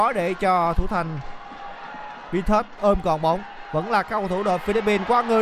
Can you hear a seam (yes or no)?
yes